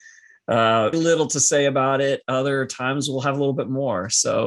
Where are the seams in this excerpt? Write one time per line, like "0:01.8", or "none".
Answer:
0:00.9

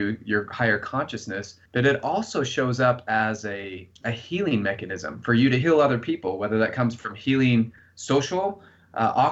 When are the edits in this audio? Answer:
0:01.7
0:04.0
0:05.6

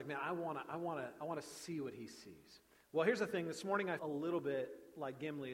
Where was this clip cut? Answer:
0:02.8
0:04.0

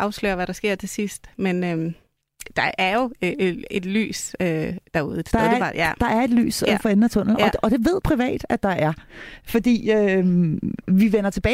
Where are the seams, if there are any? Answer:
0:08.0

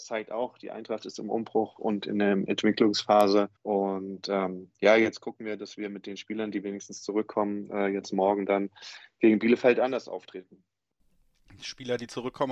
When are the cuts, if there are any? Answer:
0:03.6

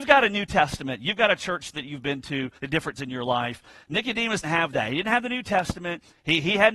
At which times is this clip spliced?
0:02.6
0:03.0
0:04.4

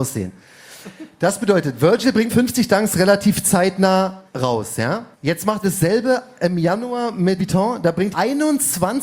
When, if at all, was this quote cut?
0:02.3
0:04.3
0:05.1
0:05.6
0:07.4
0:08.1

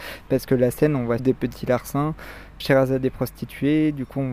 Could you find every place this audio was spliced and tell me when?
0:01.2
0:02.6

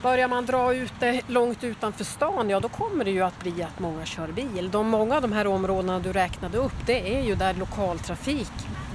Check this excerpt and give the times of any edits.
none

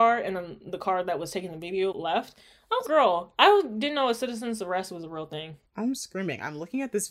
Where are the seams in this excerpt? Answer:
0:01.9
0:02.9
0:05.7

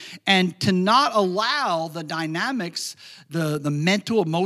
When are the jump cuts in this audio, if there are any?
none

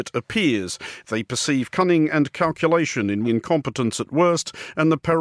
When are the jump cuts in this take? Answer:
0:03.2

